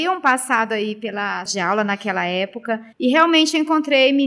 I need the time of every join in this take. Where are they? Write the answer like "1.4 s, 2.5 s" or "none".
1.5 s, 2.9 s